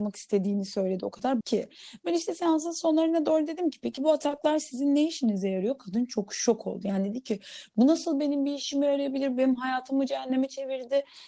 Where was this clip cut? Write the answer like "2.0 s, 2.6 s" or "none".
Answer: 1.4 s